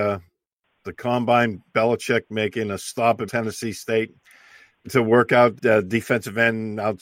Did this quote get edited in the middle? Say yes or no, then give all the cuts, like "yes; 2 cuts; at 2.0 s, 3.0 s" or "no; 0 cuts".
yes; 4 cuts; at 1.7 s, 3.3 s, 4.8 s, 5.6 s